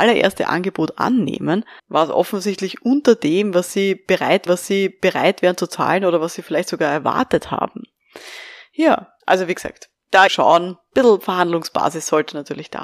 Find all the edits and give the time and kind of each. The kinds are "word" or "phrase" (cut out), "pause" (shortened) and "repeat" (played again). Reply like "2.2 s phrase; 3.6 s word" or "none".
1.8 s word; 4.5 s repeat; 9.2 s pause; 10.3 s phrase